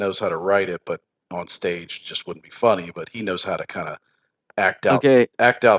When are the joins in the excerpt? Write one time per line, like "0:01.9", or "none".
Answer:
none

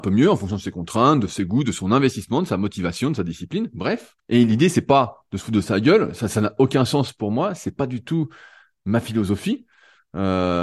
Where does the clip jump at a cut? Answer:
0:04.2

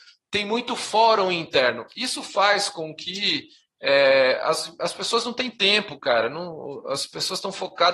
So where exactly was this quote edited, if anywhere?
none

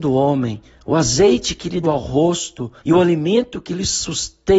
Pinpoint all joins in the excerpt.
0:01.8
0:02.8

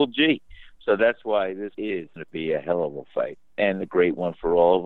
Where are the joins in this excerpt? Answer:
0:01.7
0:02.2

